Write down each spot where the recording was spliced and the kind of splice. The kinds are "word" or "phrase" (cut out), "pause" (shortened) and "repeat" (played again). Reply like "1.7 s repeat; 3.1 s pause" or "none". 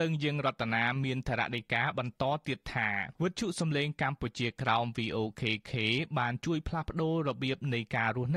3.2 s pause

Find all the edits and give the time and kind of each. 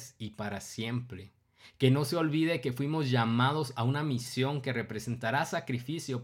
none

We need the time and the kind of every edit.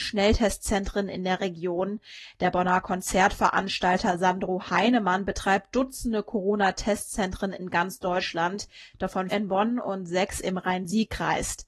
9.3 s word

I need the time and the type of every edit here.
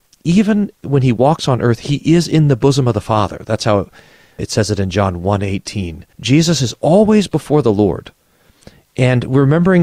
6.1 s pause

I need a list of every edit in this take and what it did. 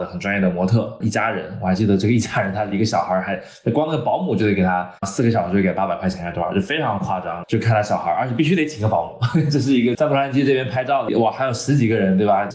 5.0 s pause

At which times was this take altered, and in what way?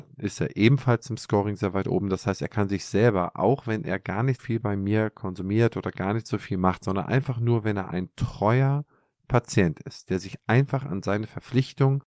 4.4 s word

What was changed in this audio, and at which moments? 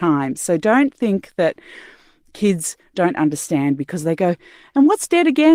none

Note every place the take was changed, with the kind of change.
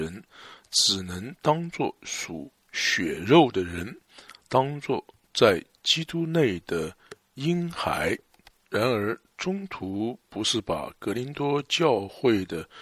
none

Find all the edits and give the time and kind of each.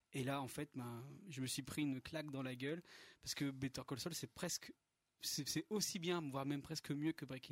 none

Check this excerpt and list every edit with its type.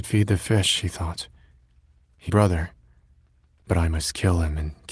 2.3 s phrase

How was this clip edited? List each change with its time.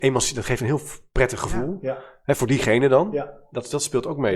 none

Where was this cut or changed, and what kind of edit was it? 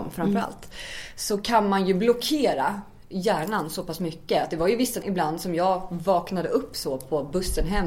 5.0 s word

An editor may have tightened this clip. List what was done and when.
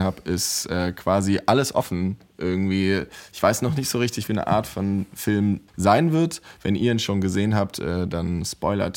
4.3 s phrase; 5.7 s pause

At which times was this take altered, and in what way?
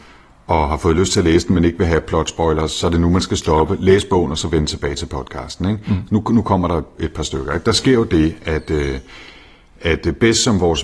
none

